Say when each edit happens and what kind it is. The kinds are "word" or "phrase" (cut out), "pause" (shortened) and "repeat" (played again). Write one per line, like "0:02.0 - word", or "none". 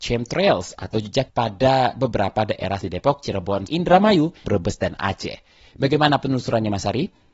0:01.3 - word
0:02.8 - word
0:03.7 - word
0:04.4 - word